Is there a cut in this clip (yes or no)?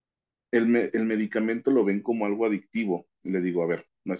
no